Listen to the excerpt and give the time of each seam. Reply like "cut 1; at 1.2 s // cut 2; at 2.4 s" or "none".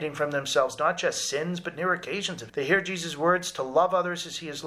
cut 1; at 2.5 s